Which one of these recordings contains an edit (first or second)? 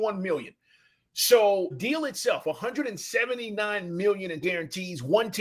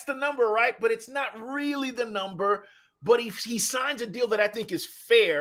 first